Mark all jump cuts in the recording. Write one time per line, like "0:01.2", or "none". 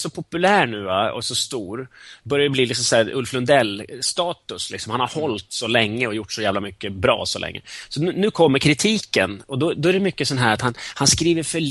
none